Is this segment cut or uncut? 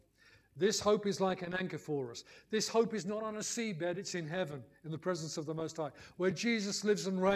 uncut